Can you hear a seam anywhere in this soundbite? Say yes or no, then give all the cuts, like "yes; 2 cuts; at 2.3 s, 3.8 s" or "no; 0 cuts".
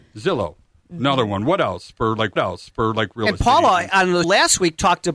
yes; 2 cuts; at 2.4 s, 4.2 s